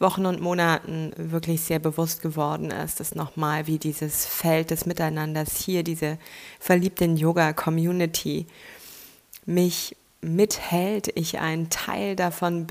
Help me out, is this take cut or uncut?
uncut